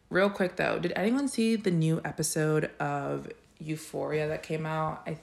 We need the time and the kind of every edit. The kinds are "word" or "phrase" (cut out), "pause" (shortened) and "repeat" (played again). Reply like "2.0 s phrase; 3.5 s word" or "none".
none